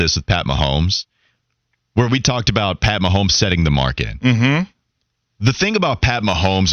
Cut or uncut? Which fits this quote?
uncut